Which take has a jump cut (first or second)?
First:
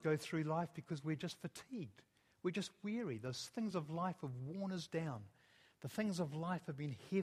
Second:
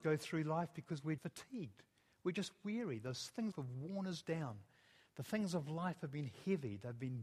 second